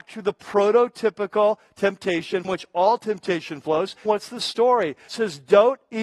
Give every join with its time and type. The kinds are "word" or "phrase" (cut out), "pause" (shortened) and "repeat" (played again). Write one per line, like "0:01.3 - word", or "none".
0:02.4 - word
0:04.1 - word
0:05.1 - word